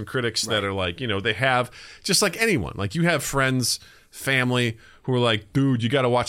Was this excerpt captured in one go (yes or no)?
yes